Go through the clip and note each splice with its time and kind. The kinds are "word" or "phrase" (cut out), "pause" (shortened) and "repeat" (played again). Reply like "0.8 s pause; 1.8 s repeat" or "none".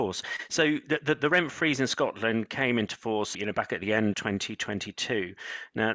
3.3 s word; 4.1 s word